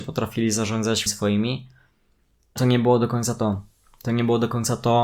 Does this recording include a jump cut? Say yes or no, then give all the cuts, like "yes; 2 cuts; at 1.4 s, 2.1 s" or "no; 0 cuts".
yes; 2 cuts; at 1.1 s, 2.6 s